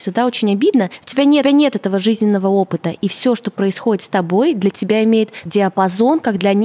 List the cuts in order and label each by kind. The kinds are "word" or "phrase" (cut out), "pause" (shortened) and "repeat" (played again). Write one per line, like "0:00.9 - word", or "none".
0:01.4 - repeat
0:05.5 - phrase